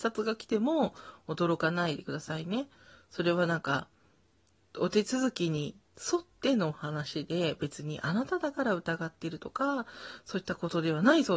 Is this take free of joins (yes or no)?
yes